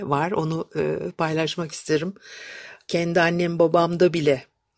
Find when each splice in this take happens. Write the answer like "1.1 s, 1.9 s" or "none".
none